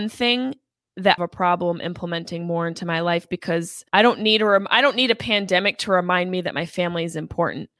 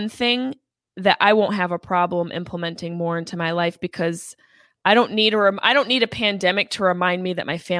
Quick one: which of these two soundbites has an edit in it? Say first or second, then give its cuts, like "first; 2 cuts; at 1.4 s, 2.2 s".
first; 2 cuts; at 1.2 s, 3.9 s